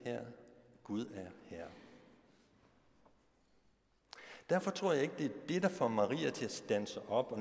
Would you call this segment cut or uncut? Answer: uncut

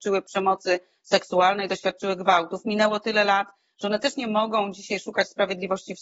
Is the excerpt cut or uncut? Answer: uncut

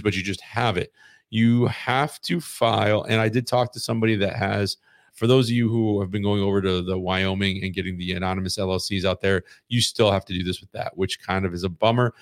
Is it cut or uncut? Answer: cut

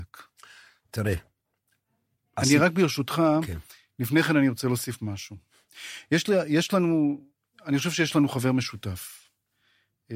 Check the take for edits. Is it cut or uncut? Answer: uncut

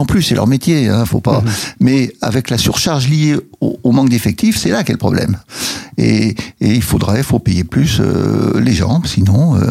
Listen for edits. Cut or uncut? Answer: uncut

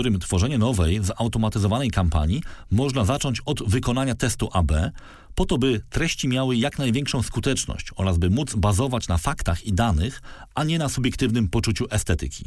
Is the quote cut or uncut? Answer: uncut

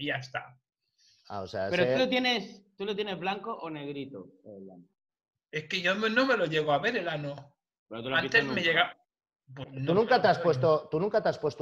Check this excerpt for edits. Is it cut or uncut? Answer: cut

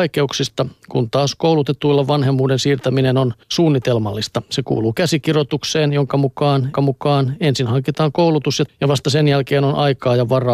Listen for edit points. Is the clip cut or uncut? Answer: cut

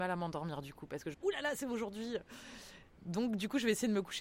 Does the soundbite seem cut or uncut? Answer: cut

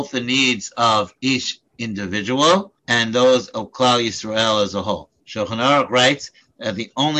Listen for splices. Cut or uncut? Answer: cut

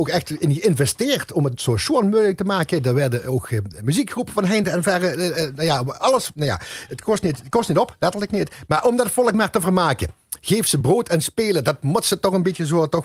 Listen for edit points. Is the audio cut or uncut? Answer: uncut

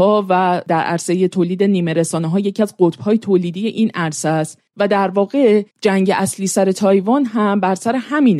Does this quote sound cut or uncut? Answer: cut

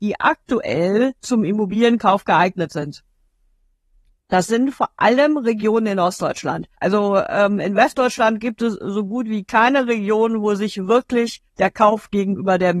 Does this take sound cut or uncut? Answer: cut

